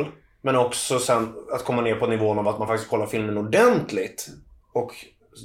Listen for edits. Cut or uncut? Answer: uncut